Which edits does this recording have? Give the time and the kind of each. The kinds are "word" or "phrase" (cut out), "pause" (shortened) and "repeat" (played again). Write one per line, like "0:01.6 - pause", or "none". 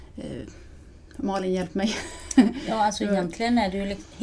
none